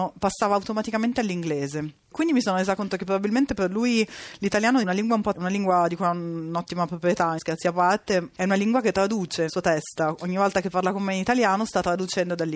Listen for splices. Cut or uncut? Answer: cut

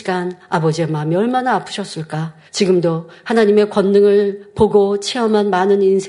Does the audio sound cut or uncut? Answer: cut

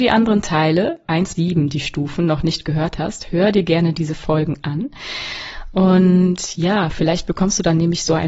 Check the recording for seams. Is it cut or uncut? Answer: cut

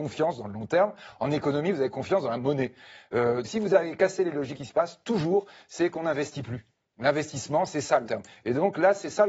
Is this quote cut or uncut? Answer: cut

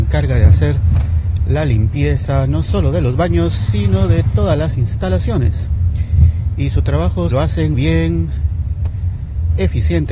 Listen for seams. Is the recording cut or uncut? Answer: cut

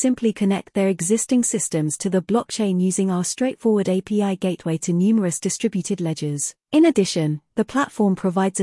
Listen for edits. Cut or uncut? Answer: cut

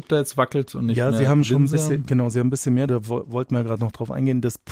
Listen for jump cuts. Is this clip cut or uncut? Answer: cut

